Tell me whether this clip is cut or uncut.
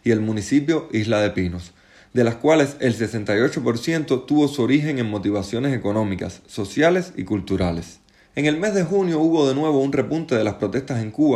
uncut